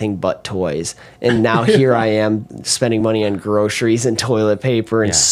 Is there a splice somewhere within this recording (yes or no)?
no